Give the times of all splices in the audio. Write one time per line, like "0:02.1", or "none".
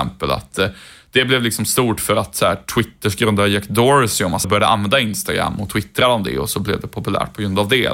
0:04.4